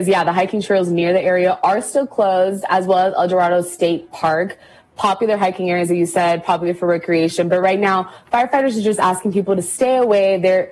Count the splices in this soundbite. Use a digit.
0